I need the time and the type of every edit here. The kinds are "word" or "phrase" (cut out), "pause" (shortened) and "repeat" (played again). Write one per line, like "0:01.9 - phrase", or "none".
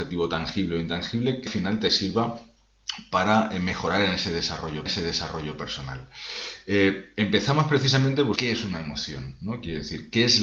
0:01.5 - word
0:04.9 - repeat
0:08.4 - phrase